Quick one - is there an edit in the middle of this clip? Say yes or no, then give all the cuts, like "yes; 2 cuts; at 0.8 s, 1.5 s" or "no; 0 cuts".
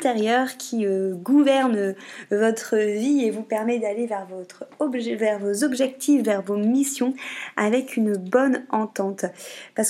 no; 0 cuts